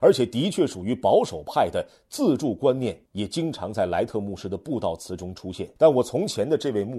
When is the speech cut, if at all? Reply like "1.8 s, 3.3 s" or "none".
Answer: 3.1 s, 5.8 s